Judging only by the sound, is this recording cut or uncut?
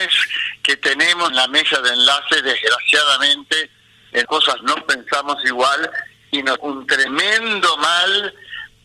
cut